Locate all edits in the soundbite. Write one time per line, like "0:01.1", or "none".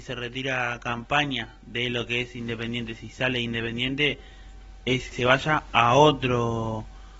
0:05.1